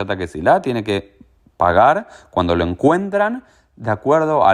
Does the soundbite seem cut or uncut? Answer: uncut